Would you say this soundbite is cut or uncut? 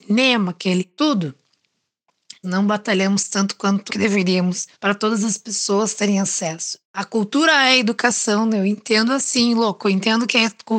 cut